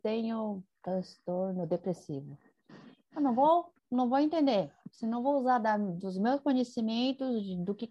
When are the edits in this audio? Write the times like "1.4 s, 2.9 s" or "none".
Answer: 3.8 s

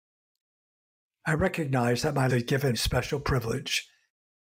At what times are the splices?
2.3 s, 2.7 s

